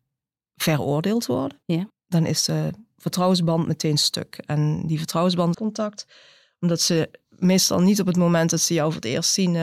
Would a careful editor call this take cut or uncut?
cut